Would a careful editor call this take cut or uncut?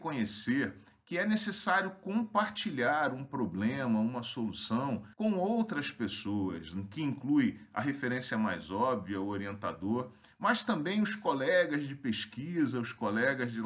cut